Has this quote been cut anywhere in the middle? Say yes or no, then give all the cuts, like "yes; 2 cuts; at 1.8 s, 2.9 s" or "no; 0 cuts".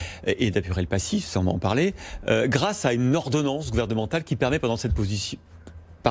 no; 0 cuts